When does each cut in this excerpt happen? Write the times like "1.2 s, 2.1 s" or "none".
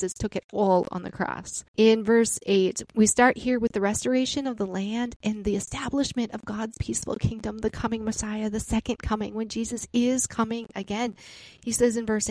1.7 s, 2.8 s